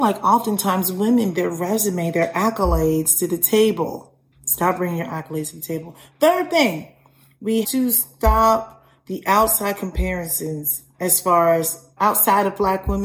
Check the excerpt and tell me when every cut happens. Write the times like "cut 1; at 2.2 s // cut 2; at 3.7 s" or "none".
cut 1; at 1.3 s // cut 2; at 7.6 s // cut 3; at 12.0 s

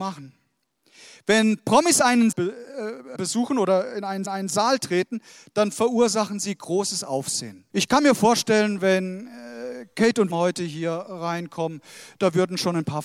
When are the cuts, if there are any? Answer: cut 1; at 2.3 s // cut 2; at 3.1 s // cut 3; at 4.2 s // cut 4; at 7.7 s // cut 5; at 10.3 s

